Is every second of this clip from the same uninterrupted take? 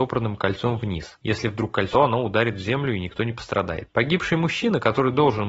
no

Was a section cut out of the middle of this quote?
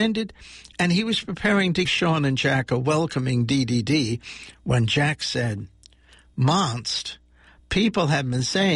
yes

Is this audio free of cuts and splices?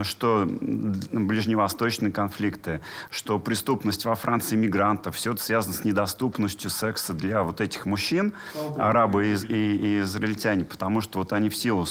yes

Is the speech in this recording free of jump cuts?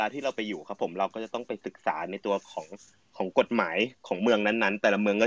yes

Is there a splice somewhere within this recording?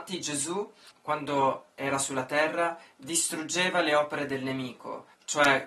yes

